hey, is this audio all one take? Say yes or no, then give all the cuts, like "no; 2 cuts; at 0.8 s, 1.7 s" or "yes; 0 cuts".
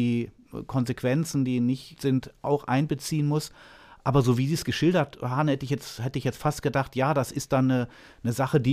no; 1 cut; at 2.0 s